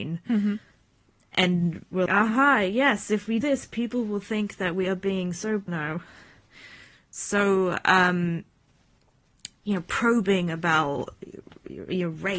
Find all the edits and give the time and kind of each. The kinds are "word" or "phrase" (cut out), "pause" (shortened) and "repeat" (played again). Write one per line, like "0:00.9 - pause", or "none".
0:02.1 - word
0:03.4 - word
0:05.7 - word